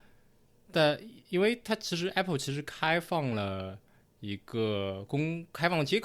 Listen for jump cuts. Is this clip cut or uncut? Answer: uncut